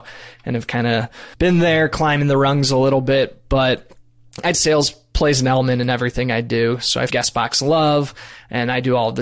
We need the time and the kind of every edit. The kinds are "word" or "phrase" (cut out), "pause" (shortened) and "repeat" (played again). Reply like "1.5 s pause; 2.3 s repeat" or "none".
1.3 s pause; 4.5 s word; 7.1 s word